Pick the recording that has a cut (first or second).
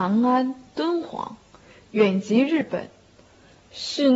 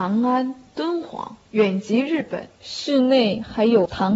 second